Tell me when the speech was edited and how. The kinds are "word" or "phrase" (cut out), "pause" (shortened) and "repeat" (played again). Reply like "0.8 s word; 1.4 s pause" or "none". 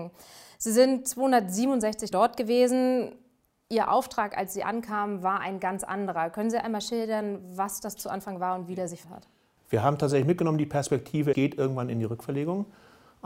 2.1 s word; 9.0 s word; 11.3 s word